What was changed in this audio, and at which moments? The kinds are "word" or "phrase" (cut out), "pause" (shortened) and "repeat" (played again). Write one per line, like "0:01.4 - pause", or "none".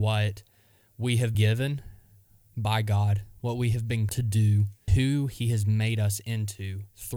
0:01.3 - word
0:04.1 - word
0:04.9 - word